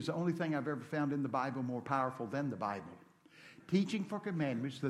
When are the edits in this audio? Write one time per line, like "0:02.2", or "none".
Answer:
none

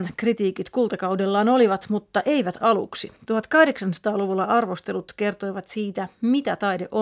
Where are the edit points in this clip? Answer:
0:03.2

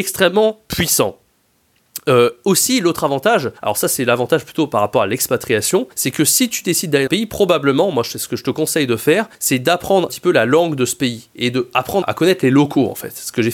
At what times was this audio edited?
0:03.6
0:05.9
0:07.1
0:09.3
0:10.1
0:12.0

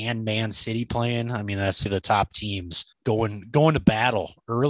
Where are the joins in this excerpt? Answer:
0:01.9
0:02.9

